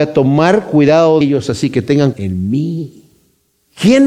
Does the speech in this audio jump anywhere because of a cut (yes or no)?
yes